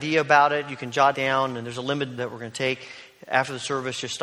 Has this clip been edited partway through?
yes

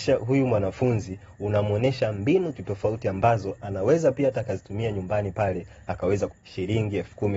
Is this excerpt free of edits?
no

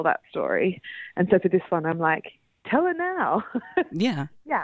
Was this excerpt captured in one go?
yes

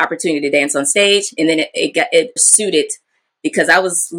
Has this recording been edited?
yes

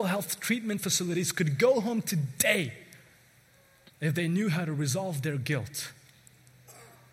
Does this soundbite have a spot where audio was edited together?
no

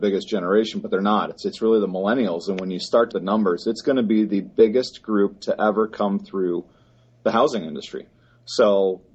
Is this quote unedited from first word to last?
no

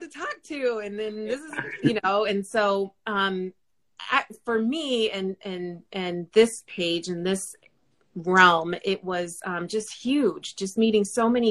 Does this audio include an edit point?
no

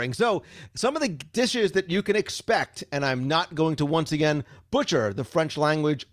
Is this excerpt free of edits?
yes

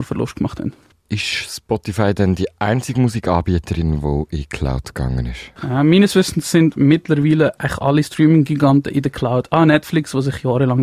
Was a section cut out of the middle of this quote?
no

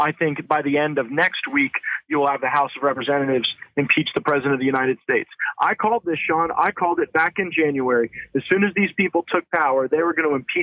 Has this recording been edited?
no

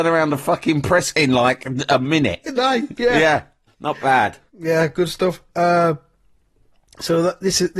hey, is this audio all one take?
no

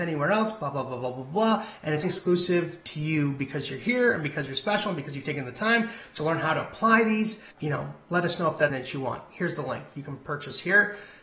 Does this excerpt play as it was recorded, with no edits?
no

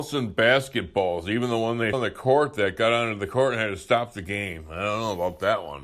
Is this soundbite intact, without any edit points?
no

